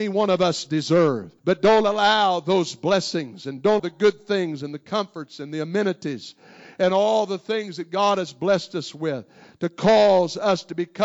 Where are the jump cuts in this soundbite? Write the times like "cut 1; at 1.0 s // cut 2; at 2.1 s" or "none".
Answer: cut 1; at 1.4 s // cut 2; at 3.8 s